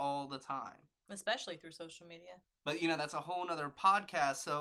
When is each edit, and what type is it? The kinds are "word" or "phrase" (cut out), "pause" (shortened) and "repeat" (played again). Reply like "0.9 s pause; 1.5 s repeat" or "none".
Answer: 1.0 s pause